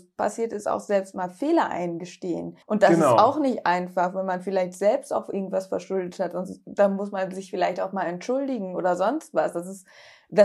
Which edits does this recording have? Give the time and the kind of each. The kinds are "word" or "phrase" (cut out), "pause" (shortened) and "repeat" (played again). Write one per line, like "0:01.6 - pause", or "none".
0:02.6 - pause